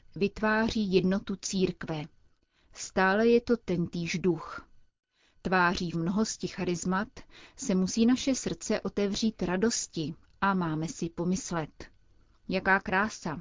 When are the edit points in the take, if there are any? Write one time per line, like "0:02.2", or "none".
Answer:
0:05.9